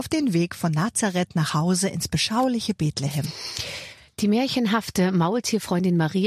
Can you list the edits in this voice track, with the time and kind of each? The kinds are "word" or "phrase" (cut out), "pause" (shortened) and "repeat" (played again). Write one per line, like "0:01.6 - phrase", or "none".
none

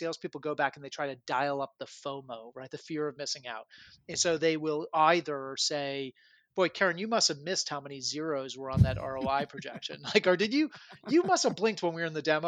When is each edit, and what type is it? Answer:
none

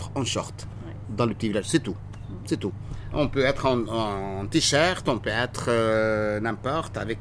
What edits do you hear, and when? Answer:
none

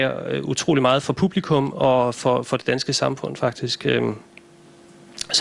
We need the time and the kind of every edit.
none

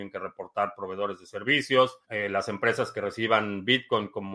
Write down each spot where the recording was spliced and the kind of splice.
0:02.0 - pause

